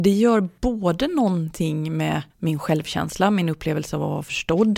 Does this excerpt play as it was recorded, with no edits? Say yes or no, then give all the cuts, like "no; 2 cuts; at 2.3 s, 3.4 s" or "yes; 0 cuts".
no; 1 cut; at 2.3 s